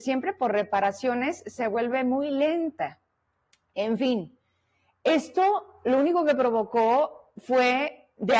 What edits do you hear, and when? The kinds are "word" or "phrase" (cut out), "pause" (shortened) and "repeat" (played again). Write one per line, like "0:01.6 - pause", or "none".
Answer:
none